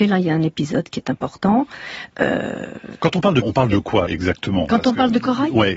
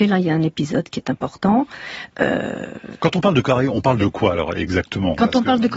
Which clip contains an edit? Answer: first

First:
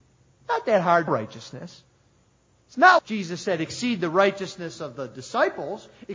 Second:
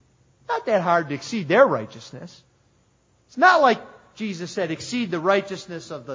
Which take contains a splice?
first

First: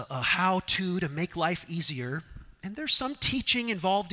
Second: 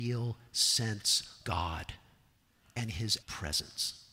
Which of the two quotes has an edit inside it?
second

